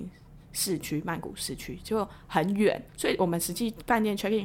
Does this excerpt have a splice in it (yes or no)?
yes